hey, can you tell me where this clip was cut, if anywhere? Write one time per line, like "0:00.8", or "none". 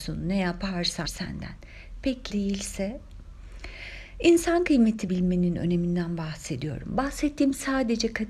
0:01.0
0:02.3
0:05.1